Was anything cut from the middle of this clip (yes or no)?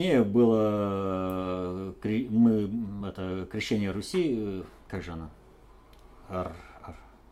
no